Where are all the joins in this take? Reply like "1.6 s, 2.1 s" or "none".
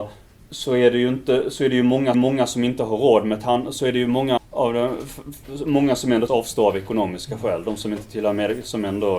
2.1 s, 4.4 s, 6.3 s

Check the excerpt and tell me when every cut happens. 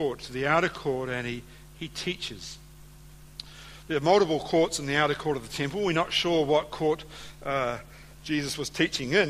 none

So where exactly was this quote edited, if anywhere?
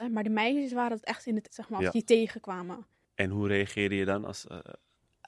1.5 s

